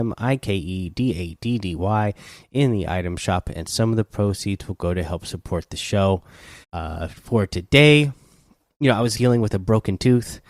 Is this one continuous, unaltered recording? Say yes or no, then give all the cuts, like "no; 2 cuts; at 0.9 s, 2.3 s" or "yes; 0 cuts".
no; 2 cuts; at 6.6 s, 9.1 s